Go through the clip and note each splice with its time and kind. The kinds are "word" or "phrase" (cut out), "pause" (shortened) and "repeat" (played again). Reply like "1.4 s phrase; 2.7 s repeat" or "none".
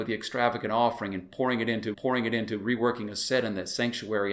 1.9 s repeat